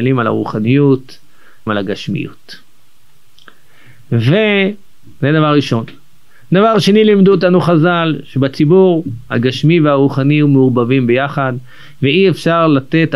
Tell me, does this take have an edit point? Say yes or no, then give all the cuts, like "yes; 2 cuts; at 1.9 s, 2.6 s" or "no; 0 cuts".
yes; 1 cut; at 1.7 s